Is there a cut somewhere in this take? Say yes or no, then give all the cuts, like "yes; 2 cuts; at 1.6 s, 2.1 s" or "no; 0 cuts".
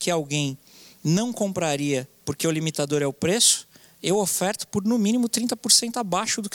no; 0 cuts